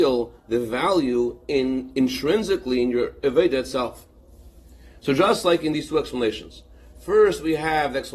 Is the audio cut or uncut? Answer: uncut